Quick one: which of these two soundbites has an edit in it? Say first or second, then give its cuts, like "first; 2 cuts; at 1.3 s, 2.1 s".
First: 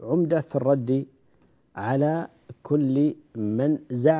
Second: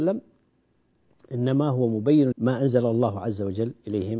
second; 1 cut; at 2.3 s